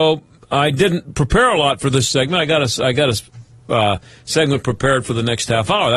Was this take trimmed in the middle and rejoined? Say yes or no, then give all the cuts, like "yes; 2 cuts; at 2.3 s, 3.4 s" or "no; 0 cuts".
no; 0 cuts